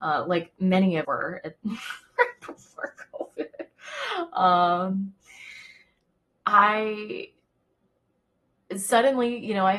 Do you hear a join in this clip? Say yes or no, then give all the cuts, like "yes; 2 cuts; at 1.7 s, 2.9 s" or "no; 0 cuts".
yes; 1 cut; at 1.0 s